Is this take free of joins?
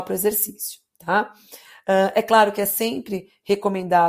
yes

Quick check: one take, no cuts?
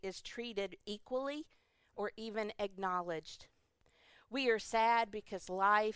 yes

